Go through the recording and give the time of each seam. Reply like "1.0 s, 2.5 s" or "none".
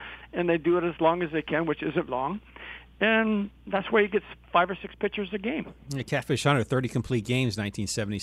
2.1 s